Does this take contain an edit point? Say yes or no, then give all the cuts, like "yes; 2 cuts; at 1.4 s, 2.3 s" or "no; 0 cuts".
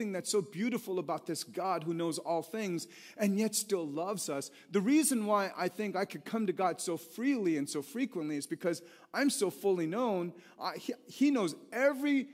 no; 0 cuts